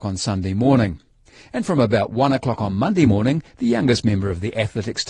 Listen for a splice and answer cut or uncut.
uncut